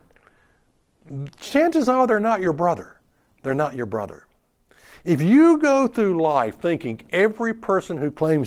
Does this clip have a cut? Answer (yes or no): no